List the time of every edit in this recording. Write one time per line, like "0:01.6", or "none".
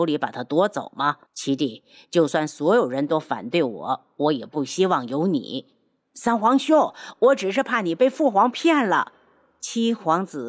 0:01.3